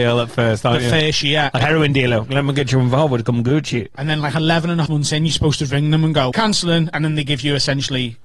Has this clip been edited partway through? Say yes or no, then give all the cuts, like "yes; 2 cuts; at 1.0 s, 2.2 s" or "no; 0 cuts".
yes; 3 cuts; at 1.6 s, 4.9 s, 6.3 s